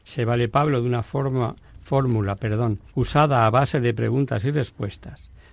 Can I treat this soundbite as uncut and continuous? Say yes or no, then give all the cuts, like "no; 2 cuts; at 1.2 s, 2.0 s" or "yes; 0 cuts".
no; 1 cut; at 2.9 s